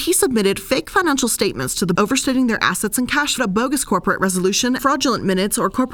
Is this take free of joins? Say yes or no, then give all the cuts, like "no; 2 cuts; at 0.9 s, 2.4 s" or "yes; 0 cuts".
no; 3 cuts; at 1.9 s, 3.4 s, 4.8 s